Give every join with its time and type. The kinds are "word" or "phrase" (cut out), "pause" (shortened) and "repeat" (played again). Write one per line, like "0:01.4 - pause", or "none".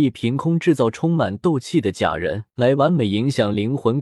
0:02.5 - pause